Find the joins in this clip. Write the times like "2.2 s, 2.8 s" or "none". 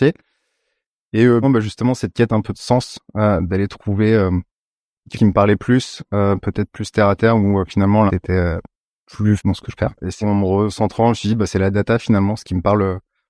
1.4 s, 5.1 s, 8.1 s, 9.4 s, 9.8 s, 10.2 s

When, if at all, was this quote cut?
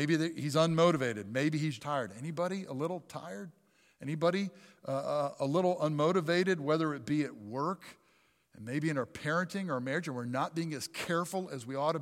1.8 s

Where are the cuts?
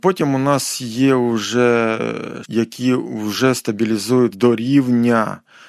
2.4 s, 4.3 s

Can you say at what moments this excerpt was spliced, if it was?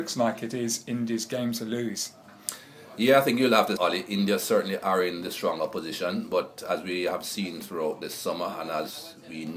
3.8 s

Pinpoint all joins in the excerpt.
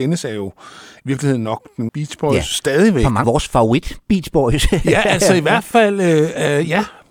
1.9 s, 3.2 s

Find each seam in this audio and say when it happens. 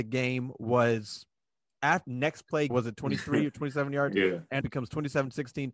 2.0 s, 2.7 s, 4.6 s

